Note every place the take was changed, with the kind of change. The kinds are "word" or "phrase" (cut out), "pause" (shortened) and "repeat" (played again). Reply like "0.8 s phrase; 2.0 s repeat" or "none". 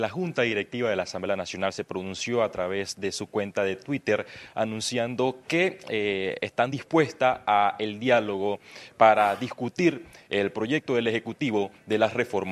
none

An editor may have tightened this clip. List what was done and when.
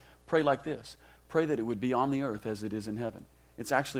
none

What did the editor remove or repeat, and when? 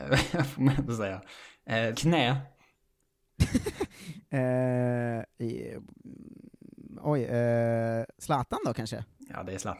1.9 s word; 8.1 s pause

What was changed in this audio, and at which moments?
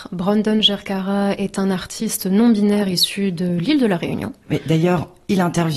none

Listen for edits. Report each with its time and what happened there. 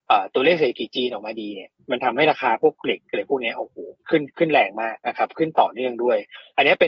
4.0 s pause; 5.0 s pause

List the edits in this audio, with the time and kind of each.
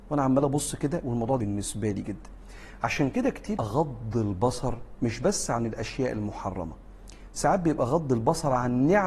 1.4 s word; 3.6 s phrase

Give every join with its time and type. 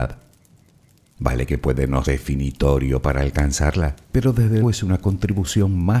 2.0 s word; 4.0 s pause; 4.6 s word

